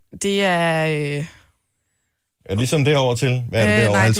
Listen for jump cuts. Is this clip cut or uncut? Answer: uncut